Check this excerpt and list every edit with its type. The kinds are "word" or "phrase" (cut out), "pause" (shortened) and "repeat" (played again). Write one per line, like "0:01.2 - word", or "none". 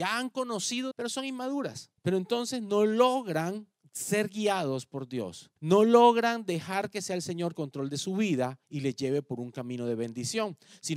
0:00.9 - phrase
0:02.0 - pause
0:03.8 - pause
0:05.6 - pause
0:07.5 - phrase
0:08.6 - pause